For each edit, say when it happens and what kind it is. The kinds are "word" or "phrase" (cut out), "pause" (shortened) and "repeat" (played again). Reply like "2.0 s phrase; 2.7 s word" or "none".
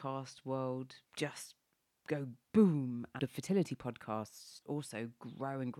1.0 s pause; 2.4 s pause; 3.2 s phrase; 4.6 s word